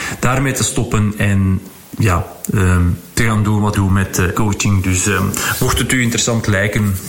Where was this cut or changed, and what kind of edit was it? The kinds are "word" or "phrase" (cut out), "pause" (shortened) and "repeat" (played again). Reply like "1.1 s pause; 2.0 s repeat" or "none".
3.7 s phrase; 4.3 s word